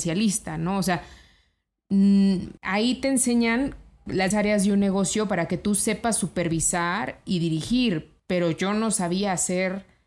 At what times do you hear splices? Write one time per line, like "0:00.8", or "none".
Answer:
0:02.6
0:04.3
0:08.2